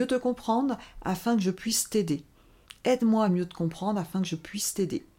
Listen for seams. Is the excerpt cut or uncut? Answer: uncut